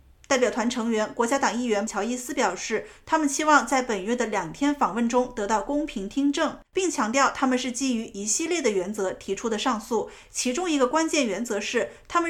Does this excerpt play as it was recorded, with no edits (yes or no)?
no